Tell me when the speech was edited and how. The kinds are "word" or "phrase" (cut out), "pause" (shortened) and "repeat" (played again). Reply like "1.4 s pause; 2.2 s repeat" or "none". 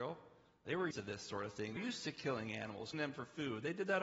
0.9 s word; 1.8 s word; 2.9 s word